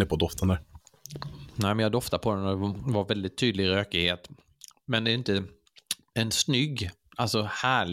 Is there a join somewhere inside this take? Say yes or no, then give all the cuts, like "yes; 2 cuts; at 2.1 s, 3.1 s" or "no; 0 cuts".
no; 0 cuts